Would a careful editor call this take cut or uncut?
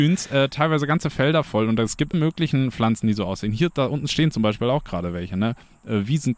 cut